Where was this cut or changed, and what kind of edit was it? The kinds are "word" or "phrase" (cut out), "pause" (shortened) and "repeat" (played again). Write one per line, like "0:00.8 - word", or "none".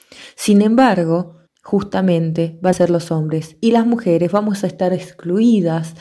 0:01.5 - pause
0:02.7 - word